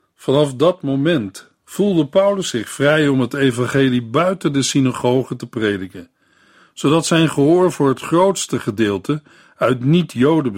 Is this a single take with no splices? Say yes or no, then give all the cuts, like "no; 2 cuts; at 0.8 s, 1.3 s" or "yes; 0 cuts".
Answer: yes; 0 cuts